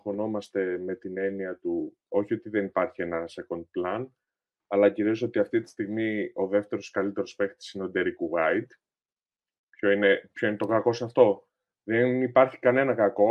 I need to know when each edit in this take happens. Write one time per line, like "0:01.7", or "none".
none

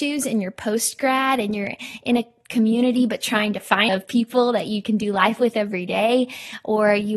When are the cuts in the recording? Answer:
0:03.9

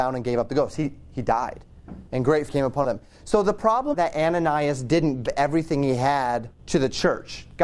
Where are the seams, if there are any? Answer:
0:02.1
0:02.5
0:02.8
0:03.9
0:05.3
0:06.6

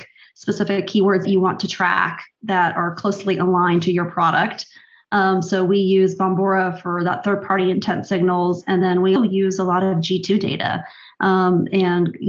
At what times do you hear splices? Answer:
0:01.2
0:09.2

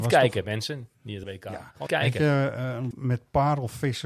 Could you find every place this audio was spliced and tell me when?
0:01.2
0:01.9
0:02.9

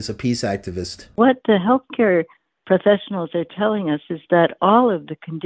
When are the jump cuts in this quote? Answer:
0:01.1

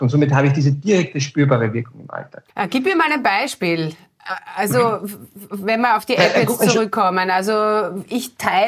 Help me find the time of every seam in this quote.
0:02.5

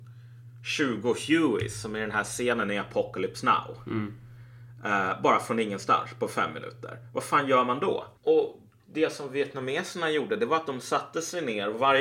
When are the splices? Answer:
0:08.2

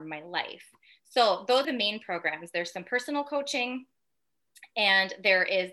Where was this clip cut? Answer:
0:01.6

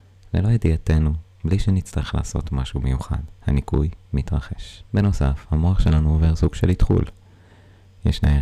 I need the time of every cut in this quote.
0:03.4
0:04.9

